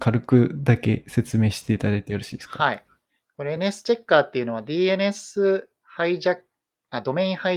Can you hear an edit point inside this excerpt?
no; 0 cuts

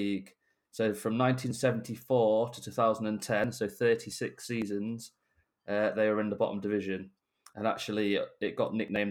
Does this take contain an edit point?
no; 0 cuts

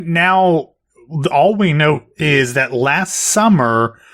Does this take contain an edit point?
no; 0 cuts

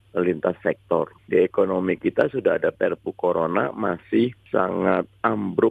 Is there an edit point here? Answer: no; 0 cuts

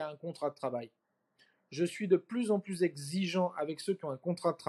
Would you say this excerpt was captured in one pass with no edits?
yes; 0 cuts

